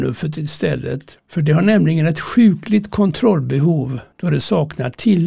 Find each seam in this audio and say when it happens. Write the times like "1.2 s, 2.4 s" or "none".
1.2 s, 4.1 s